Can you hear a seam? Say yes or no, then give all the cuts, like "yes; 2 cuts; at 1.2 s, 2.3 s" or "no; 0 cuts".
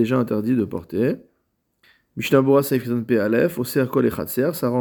yes; 1 cut; at 1.8 s